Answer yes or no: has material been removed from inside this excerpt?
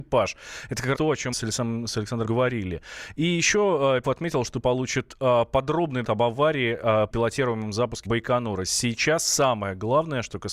yes